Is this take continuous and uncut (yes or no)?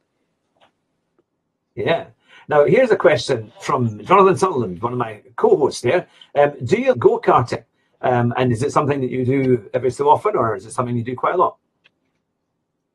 no